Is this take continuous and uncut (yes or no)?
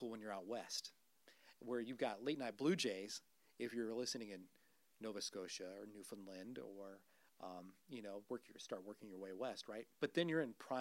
yes